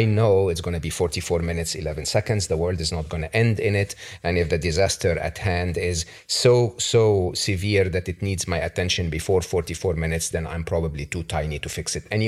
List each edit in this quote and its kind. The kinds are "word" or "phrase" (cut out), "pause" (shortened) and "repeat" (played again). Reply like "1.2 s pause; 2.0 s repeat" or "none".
none